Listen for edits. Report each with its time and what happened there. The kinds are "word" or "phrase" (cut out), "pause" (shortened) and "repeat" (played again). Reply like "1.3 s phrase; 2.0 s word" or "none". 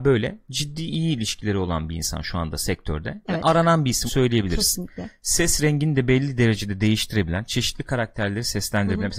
4.1 s word